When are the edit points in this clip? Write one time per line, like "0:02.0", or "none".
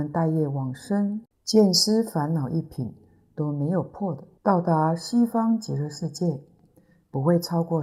0:01.3
0:04.4